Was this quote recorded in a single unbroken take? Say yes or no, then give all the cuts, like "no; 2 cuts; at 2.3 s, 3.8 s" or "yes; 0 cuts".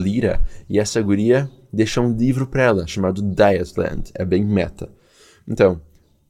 yes; 0 cuts